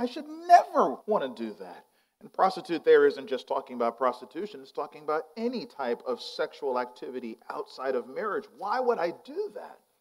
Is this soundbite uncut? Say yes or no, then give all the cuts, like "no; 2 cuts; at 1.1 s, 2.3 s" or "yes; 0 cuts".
no; 1 cut; at 1.0 s